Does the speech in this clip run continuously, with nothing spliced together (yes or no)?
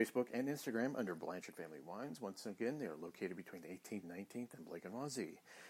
no